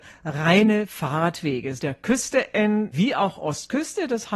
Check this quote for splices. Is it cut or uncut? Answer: cut